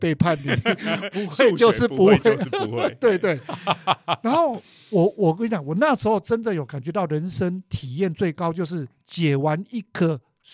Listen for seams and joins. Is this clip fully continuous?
yes; 0 cuts

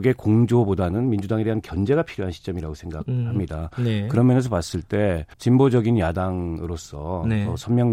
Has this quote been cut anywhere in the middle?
yes; 1 cut; at 5.3 s

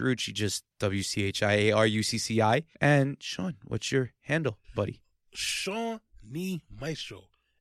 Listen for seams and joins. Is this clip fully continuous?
no; 2 cuts; at 2.7 s, 4.6 s

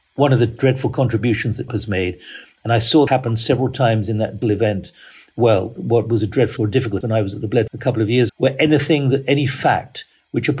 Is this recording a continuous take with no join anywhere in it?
no; 8 cuts; at 1.7 s, 3.1 s, 4.4 s, 5.8 s, 6.6 s, 7.0 s, 7.7 s, 8.3 s

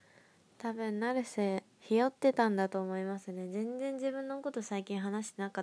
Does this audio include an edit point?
yes; 1 cut; at 1.7 s

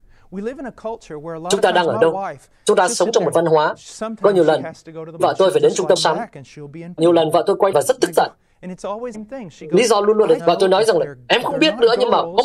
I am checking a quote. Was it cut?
yes; 7 cuts; at 3.3 s, 5.2 s, 6.0 s, 7.0 s, 7.7 s, 9.1 s, 10.4 s

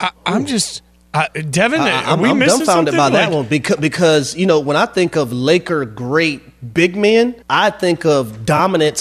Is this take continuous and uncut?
no; 1 cut; at 7.4 s

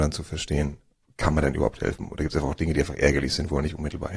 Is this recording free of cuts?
yes; 0 cuts

